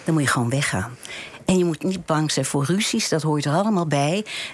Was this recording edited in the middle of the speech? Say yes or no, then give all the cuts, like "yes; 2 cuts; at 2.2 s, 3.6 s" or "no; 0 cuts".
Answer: no; 0 cuts